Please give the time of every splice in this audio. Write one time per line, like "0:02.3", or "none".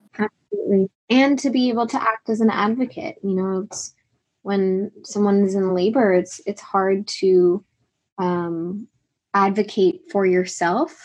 none